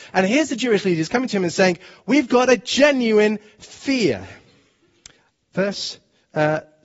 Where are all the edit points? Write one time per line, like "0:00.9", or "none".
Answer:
none